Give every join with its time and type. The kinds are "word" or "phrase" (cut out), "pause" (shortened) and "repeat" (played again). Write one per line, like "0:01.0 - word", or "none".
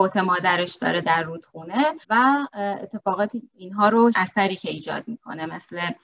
0:01.0 - phrase
0:02.0 - pause
0:03.4 - word
0:04.1 - phrase